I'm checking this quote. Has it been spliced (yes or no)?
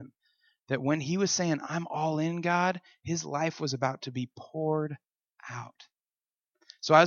no